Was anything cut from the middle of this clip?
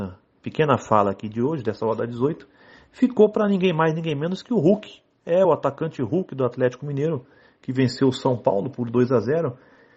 no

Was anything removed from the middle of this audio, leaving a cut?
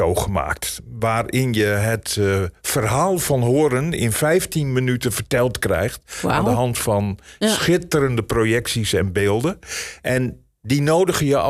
no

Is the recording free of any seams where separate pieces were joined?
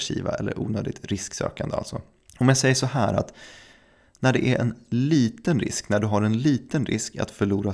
no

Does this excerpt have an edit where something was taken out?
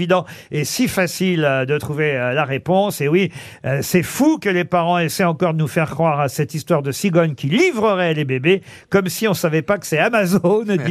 no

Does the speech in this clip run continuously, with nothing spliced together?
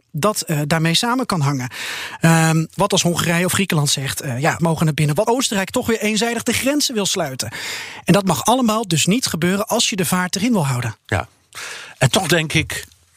no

